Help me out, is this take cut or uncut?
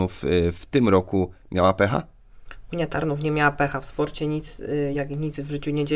uncut